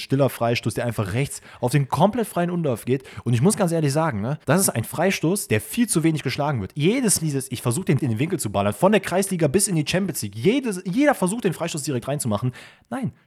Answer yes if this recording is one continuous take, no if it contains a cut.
no